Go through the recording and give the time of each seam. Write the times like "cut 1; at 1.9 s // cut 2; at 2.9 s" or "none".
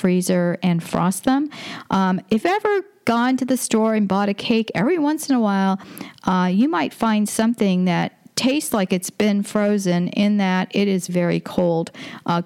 cut 1; at 2.4 s // cut 2; at 11.1 s

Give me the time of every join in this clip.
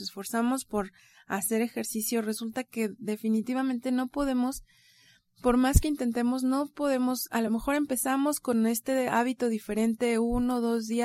none

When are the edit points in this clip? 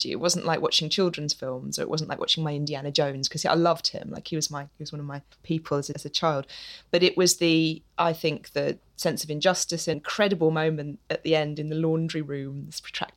cut 1; at 5.3 s // cut 2; at 5.9 s // cut 3; at 9.9 s

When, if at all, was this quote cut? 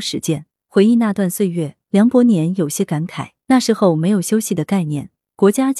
cut 1; at 3.4 s

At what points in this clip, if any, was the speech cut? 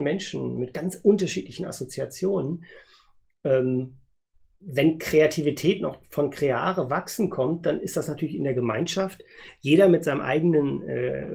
none

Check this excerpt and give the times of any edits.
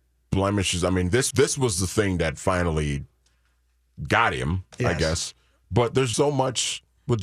cut 1; at 1.3 s // cut 2; at 6.1 s

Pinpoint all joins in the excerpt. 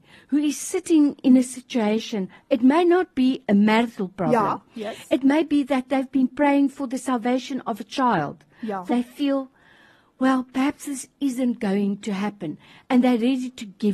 cut 1; at 8.9 s

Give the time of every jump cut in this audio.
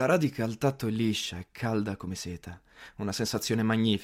none

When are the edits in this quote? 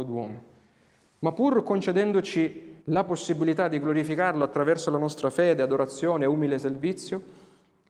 cut 1; at 2.8 s

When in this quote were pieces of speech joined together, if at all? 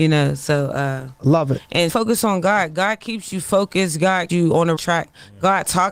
cut 1; at 1.9 s // cut 2; at 4.3 s // cut 3; at 4.8 s

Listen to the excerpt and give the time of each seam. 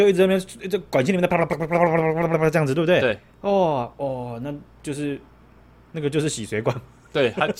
none

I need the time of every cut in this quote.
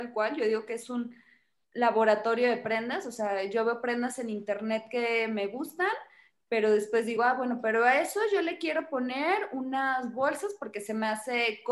none

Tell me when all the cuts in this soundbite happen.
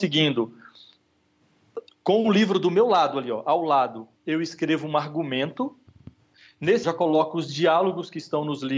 cut 1; at 4.2 s // cut 2; at 6.8 s

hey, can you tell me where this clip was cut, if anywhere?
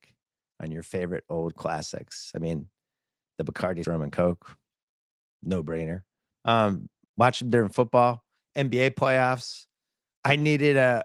cut 1; at 3.8 s // cut 2; at 7.0 s

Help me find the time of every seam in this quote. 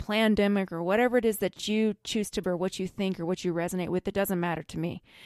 cut 1; at 2.4 s

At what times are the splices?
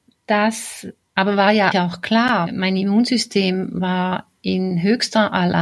cut 1; at 1.7 s // cut 2; at 2.5 s

